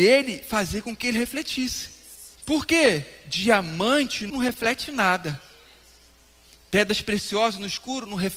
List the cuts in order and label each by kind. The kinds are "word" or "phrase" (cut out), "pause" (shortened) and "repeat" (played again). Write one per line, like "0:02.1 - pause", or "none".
0:02.3 - pause
0:04.3 - word